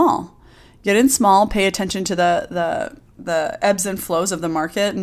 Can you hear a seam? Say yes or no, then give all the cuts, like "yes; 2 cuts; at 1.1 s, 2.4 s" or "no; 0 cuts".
yes; 1 cut; at 3.1 s